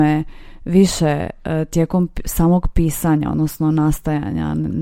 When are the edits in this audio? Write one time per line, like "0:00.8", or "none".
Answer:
none